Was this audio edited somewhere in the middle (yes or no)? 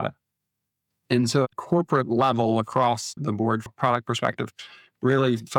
yes